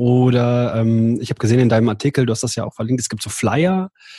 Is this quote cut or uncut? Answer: uncut